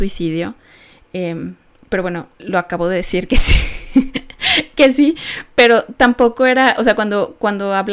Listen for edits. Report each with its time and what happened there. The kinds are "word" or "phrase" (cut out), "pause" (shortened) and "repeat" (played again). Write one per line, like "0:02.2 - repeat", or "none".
0:02.3 - pause